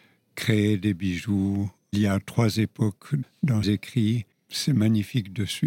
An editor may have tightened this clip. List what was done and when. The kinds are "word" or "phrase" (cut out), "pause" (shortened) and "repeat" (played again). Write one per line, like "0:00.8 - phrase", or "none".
0:03.6 - word